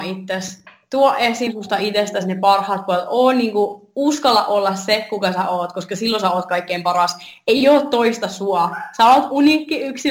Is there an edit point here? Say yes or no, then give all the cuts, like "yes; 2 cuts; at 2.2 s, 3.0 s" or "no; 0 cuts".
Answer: no; 0 cuts